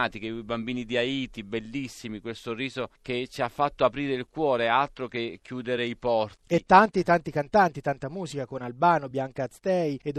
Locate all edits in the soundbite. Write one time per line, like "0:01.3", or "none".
none